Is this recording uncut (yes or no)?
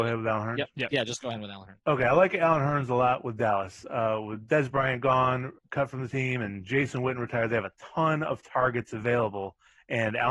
no